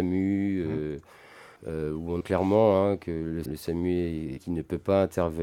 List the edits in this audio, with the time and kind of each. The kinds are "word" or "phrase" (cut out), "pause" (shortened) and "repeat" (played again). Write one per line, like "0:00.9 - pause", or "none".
0:01.6 - pause
0:02.2 - word
0:03.5 - word
0:04.4 - word